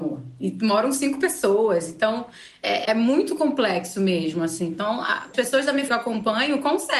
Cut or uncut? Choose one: cut